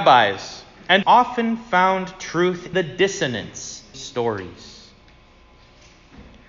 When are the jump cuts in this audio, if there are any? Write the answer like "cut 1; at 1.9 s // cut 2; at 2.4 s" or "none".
cut 1; at 1.0 s // cut 2; at 2.7 s // cut 3; at 3.9 s